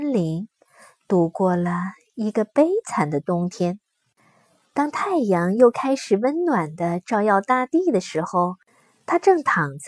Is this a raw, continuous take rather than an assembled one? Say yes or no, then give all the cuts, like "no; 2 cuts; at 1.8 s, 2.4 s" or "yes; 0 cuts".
yes; 0 cuts